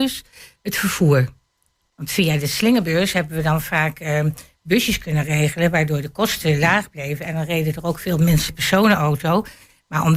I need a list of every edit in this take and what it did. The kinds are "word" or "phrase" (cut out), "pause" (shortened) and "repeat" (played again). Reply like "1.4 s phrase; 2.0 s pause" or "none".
8.5 s phrase